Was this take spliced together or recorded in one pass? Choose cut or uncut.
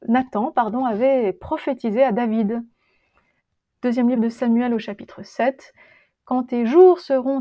uncut